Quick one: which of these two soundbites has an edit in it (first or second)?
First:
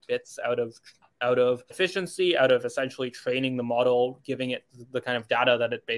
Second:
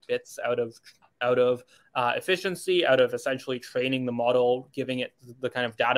first